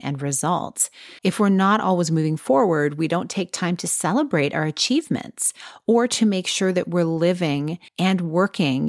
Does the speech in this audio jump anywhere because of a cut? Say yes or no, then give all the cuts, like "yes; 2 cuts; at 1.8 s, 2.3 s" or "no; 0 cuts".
yes; 2 cuts; at 1.2 s, 7.9 s